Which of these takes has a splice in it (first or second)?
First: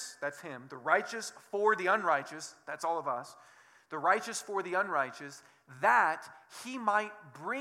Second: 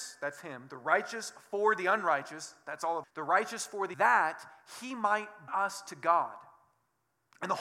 second